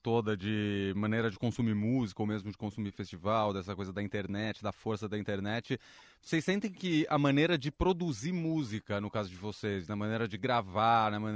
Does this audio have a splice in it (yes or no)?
no